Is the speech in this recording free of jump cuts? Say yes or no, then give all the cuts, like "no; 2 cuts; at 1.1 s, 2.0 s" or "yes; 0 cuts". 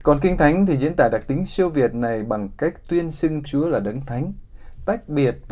no; 1 cut; at 3.5 s